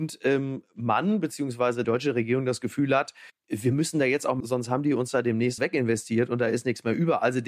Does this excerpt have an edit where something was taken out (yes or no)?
yes